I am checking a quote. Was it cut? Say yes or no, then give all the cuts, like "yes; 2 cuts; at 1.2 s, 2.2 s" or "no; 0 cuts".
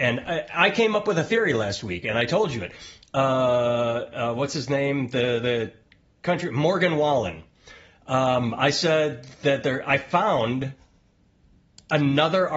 no; 0 cuts